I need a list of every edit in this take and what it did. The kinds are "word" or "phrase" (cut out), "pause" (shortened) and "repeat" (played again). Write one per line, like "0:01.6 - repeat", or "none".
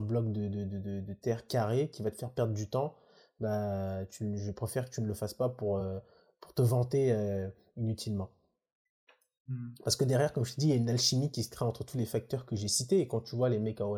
none